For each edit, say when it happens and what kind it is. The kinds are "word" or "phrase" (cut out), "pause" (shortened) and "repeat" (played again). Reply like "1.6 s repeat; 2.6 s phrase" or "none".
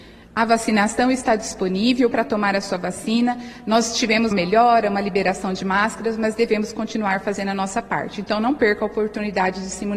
2.1 s word; 4.3 s word